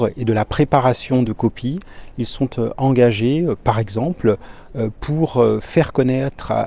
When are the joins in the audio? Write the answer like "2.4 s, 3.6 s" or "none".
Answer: 1.3 s